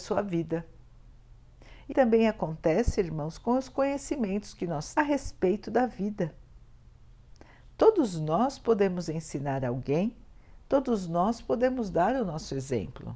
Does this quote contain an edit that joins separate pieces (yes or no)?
yes